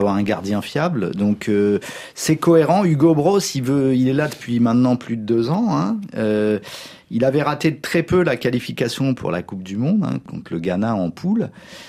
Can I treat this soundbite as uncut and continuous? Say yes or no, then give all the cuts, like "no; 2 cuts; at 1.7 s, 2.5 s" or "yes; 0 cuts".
yes; 0 cuts